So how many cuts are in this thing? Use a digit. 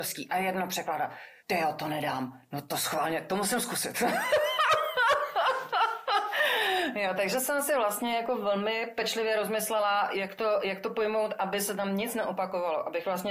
1